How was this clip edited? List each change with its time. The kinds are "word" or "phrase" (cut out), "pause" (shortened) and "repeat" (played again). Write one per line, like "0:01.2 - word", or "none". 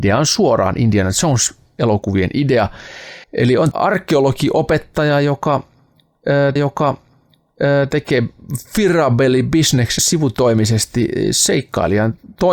0:03.2 - pause
0:03.7 - word
0:06.6 - repeat
0:10.0 - word